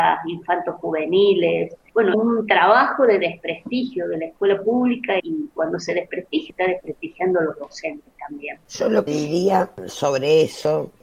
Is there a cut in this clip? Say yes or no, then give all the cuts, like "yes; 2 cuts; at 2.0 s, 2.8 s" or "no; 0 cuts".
yes; 5 cuts; at 2.1 s, 5.2 s, 6.5 s, 8.6 s, 9.1 s